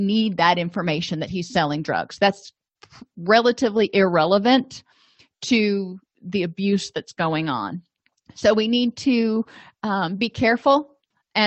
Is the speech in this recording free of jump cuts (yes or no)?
yes